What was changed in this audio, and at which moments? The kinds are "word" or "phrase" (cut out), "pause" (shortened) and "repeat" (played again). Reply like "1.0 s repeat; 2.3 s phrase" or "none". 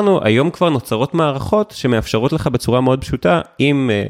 none